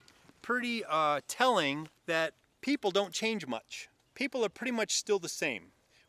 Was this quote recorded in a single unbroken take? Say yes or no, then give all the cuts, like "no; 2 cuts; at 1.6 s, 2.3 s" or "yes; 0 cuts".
no; 2 cuts; at 2.0 s, 4.0 s